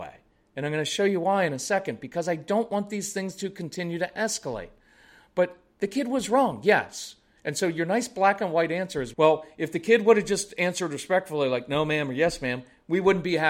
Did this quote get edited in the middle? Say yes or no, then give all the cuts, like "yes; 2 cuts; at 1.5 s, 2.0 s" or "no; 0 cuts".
yes; 1 cut; at 9.1 s